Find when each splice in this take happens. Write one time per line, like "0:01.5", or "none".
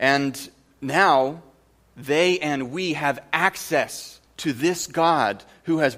none